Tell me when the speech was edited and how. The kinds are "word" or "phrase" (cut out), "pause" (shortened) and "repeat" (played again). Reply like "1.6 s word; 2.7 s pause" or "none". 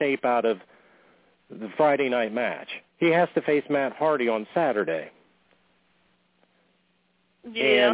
2.9 s pause